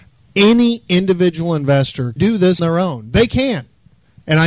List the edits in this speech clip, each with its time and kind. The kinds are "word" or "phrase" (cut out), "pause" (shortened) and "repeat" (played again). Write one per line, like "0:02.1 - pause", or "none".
0:02.2 - word
0:02.6 - word